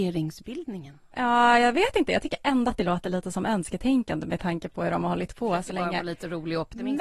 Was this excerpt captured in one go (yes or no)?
yes